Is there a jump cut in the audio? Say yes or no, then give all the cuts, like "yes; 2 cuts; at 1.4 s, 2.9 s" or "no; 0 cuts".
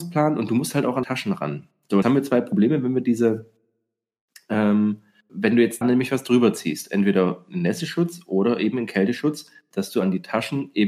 yes; 4 cuts; at 1.0 s, 2.0 s, 5.3 s, 5.8 s